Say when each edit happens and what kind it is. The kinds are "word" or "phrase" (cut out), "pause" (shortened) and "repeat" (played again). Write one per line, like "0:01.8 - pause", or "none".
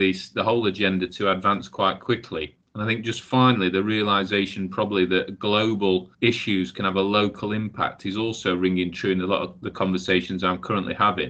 0:06.1 - pause